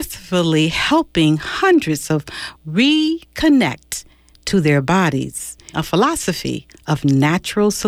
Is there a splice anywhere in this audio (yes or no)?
yes